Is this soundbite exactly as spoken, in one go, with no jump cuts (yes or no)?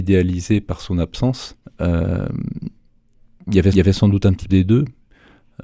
no